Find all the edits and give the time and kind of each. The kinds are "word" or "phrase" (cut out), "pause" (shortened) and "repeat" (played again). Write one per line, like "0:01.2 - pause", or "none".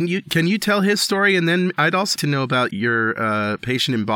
0:02.2 - word
0:02.7 - word